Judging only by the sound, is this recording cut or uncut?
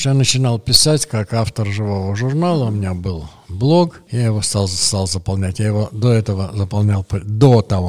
uncut